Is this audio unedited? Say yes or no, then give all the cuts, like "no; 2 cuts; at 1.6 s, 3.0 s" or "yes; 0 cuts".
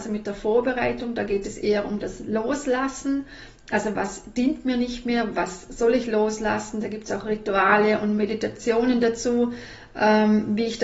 yes; 0 cuts